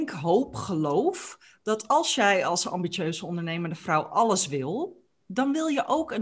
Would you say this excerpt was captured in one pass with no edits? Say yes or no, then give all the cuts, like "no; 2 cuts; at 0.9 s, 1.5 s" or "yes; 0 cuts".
yes; 0 cuts